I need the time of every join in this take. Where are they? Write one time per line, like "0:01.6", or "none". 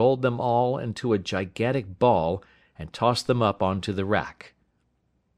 none